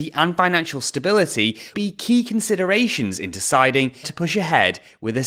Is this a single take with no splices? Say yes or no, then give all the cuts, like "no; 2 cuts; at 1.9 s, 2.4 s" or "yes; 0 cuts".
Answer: no; 2 cuts; at 1.7 s, 4.0 s